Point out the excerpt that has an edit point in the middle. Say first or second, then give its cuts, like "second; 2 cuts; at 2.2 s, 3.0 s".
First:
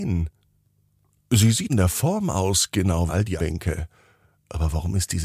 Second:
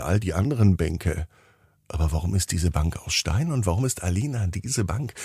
first; 3 cuts; at 1.7 s, 3.1 s, 3.4 s